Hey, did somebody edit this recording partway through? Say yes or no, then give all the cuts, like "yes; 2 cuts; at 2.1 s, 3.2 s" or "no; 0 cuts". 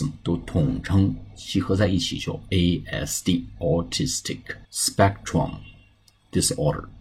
yes; 1 cut; at 4.6 s